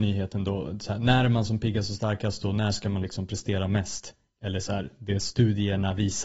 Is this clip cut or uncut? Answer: uncut